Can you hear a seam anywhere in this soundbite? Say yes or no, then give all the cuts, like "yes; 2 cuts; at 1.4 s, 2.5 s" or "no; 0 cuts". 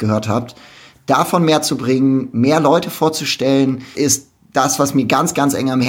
yes; 1 cut; at 3.9 s